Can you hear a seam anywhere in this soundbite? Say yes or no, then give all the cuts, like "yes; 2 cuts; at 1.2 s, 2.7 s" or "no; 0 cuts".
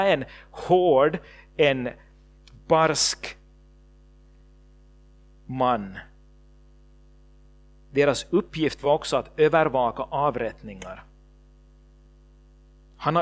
no; 0 cuts